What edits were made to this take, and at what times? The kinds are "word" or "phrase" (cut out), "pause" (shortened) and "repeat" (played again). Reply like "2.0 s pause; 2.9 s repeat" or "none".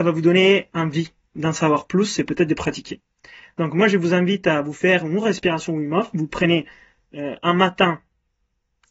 none